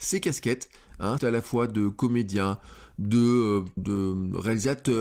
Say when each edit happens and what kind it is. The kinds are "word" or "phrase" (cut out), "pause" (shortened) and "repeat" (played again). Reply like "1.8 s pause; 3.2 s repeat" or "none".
1.2 s phrase; 3.8 s word